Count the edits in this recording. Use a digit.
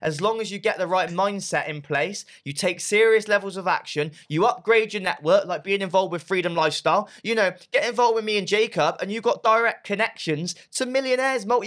0